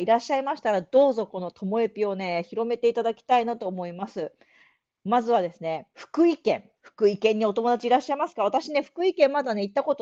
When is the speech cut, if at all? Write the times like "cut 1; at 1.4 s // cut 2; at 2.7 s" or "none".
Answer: cut 1; at 5.9 s // cut 2; at 6.8 s